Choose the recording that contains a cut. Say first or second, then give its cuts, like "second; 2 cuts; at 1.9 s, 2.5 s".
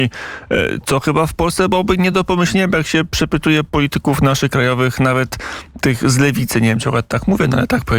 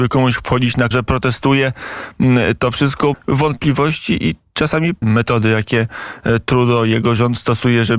second; 3 cuts; at 0.9 s, 3.1 s, 5.0 s